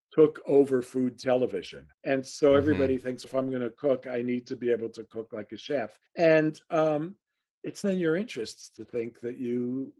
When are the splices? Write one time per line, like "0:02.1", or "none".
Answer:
0:01.9
0:03.2
0:06.1
0:07.8